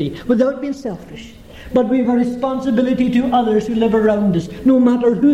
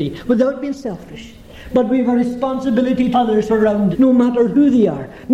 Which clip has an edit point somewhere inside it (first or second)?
second